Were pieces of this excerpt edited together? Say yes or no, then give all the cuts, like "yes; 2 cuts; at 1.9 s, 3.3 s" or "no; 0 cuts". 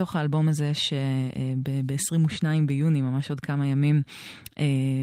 no; 0 cuts